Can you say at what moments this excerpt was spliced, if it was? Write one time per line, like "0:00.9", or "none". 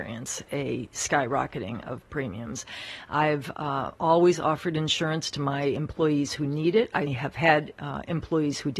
0:07.1